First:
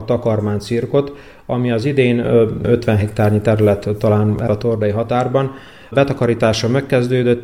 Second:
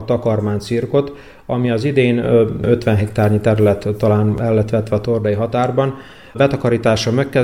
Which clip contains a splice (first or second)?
first